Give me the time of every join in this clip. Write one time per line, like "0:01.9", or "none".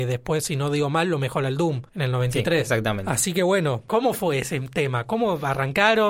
0:01.9